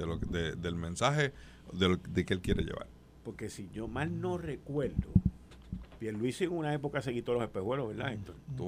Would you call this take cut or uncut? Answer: uncut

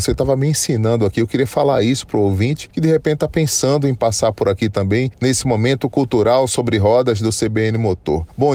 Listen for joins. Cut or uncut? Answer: uncut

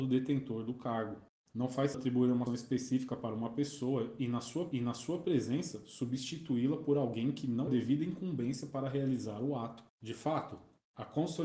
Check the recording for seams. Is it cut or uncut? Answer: cut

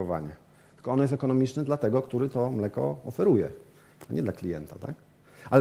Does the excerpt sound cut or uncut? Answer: uncut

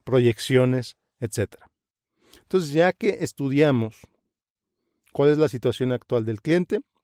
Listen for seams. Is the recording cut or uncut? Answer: uncut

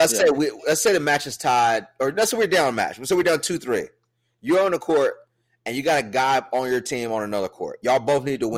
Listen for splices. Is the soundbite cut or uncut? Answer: uncut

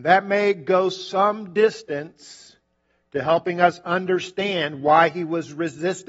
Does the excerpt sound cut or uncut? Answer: uncut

